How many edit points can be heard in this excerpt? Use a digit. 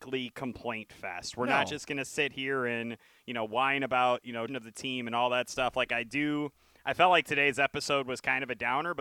1